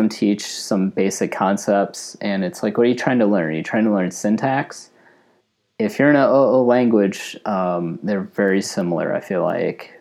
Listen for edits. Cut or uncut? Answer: uncut